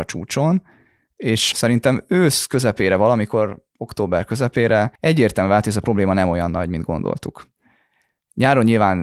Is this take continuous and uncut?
no; 1 cut; at 5.0 s

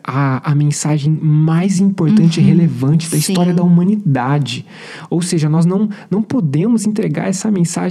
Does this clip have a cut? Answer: no; 0 cuts

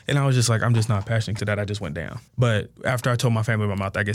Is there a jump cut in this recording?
yes; 2 cuts; at 1.4 s, 2.3 s

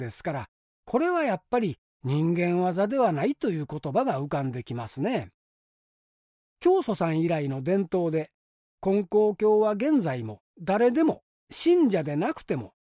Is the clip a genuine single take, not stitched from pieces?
no; 1 cut; at 10.5 s

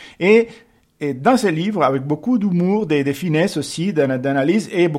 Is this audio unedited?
yes; 0 cuts

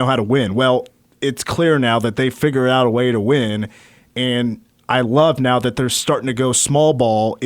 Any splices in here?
no; 0 cuts

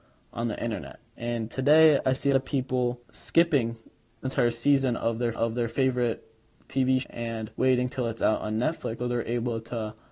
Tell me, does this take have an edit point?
yes; 8 cuts; at 1.1 s, 2.3 s, 3.0 s, 4.2 s, 5.3 s, 7.0 s, 7.5 s, 9.0 s

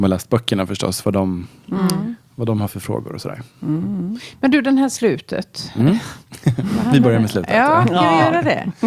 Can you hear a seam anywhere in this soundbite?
no; 0 cuts

